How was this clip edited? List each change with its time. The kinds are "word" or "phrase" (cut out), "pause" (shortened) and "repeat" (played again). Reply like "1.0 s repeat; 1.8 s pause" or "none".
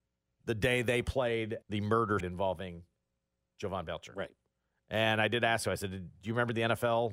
1.6 s word; 2.2 s word